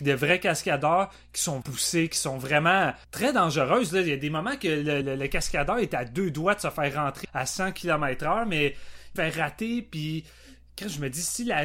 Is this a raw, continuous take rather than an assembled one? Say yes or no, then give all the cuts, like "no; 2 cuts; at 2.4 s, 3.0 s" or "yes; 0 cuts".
no; 5 cuts; at 1.6 s, 3.0 s, 5.0 s, 7.2 s, 9.2 s